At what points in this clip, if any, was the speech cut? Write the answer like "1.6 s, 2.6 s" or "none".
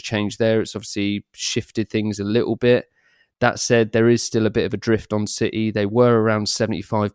none